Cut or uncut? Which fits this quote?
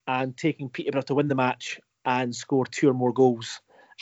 uncut